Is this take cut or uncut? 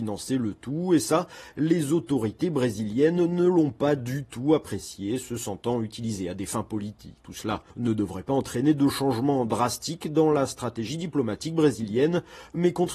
cut